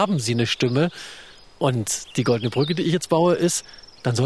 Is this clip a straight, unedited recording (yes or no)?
yes